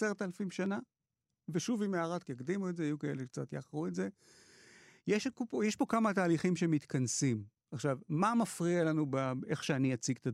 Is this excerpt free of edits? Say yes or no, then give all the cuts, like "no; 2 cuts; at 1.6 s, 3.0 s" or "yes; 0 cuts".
no; 1 cut; at 2.2 s